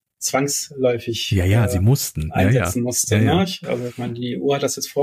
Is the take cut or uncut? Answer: uncut